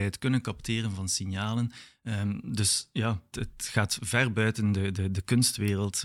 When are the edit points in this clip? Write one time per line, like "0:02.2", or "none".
0:03.3